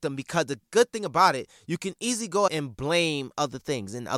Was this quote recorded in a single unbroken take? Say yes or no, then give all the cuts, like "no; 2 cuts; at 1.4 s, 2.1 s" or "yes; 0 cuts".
no; 1 cut; at 2.5 s